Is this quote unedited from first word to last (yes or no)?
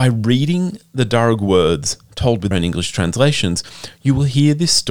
no